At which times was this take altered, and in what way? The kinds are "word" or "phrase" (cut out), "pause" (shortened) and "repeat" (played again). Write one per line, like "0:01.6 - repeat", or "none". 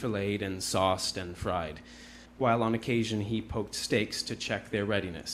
0:02.3 - pause